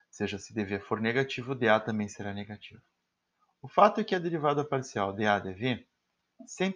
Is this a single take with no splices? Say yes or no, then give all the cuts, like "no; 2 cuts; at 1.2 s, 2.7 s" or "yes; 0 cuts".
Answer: yes; 0 cuts